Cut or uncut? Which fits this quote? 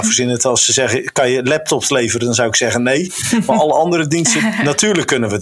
uncut